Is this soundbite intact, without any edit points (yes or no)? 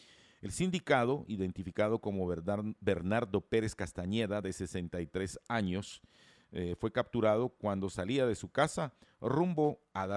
yes